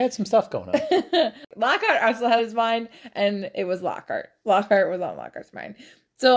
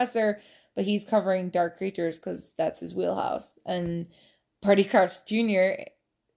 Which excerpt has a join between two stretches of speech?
first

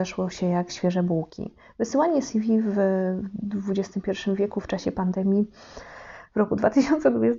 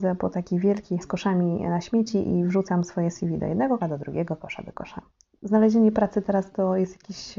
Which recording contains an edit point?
second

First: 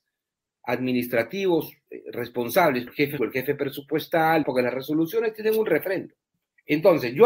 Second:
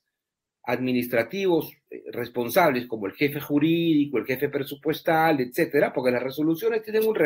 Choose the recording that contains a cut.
first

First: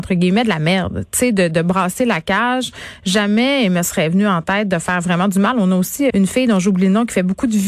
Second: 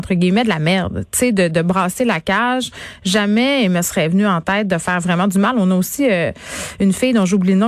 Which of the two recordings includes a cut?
first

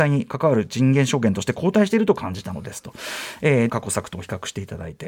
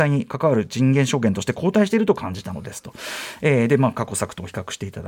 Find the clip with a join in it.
first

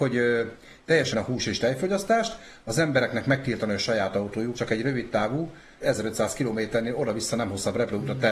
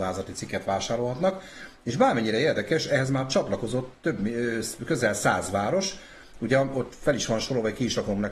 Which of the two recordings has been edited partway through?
first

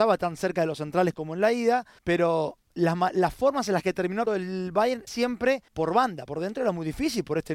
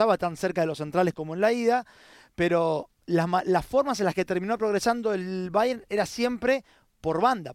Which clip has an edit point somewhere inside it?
first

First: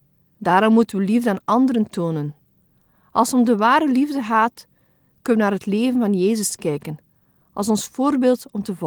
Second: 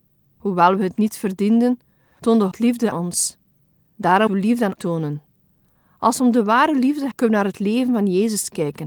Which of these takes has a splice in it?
second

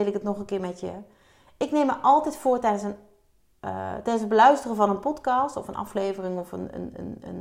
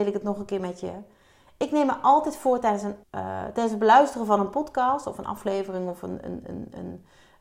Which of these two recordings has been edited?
second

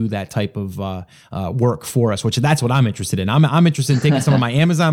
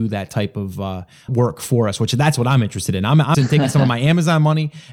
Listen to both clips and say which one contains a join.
second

